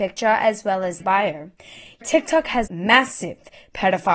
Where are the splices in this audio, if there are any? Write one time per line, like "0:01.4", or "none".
0:01.0
0:02.0
0:02.7